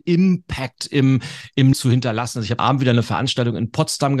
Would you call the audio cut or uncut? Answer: cut